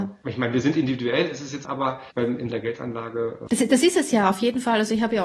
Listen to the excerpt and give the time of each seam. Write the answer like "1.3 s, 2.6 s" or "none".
1.6 s, 2.1 s, 2.5 s, 3.5 s

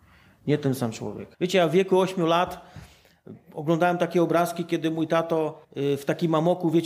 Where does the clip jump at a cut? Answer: 1.3 s, 5.6 s

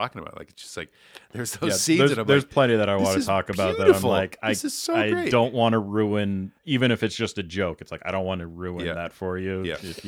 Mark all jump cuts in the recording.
6.6 s

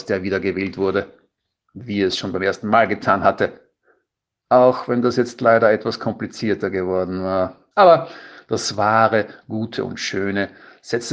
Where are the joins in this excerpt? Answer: 7.7 s

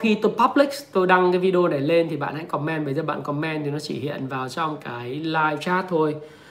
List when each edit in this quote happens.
none

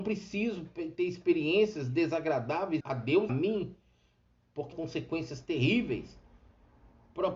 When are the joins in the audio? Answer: 2.8 s, 3.3 s, 4.7 s

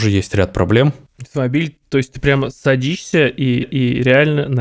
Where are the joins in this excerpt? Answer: 3.6 s

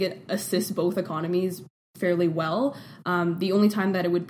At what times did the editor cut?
none

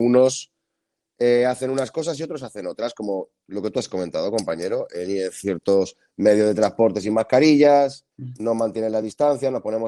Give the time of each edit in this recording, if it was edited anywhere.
8.1 s

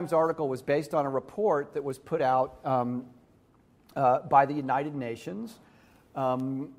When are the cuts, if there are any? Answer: none

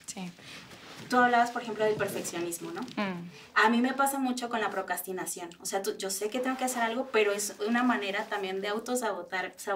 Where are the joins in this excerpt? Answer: none

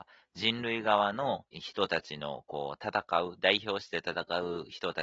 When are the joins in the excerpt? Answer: 1.5 s

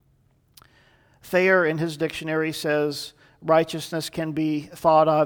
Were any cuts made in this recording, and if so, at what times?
none

